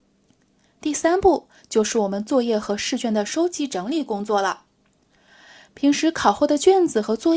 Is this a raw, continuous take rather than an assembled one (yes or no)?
yes